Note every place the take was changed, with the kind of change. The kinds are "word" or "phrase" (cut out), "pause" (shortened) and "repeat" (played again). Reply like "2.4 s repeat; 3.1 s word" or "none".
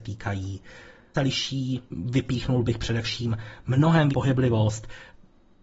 1.1 s phrase; 1.9 s pause; 4.1 s word